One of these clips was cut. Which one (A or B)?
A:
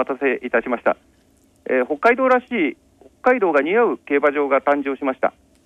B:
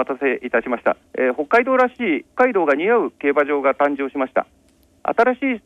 B